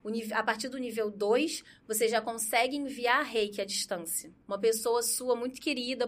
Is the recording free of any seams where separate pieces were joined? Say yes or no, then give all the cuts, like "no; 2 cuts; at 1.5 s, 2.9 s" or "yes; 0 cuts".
no; 1 cut; at 4.4 s